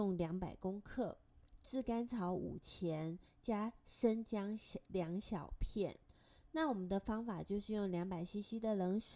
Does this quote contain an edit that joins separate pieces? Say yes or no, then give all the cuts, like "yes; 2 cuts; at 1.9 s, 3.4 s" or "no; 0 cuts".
no; 0 cuts